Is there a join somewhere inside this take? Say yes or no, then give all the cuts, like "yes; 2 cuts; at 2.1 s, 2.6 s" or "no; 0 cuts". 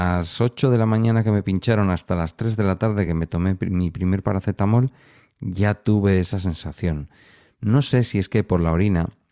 no; 0 cuts